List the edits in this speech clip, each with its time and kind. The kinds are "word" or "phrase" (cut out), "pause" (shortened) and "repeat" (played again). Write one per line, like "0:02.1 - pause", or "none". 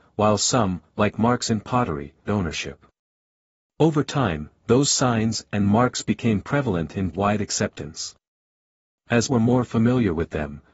0:02.3 - word
0:07.1 - word
0:09.3 - word